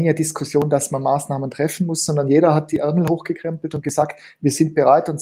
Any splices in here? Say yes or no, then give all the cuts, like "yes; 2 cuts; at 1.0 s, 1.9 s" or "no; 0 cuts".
no; 0 cuts